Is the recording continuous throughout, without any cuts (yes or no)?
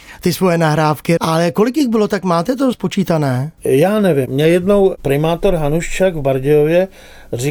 no